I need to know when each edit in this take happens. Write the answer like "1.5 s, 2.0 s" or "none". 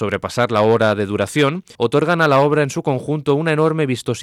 1.7 s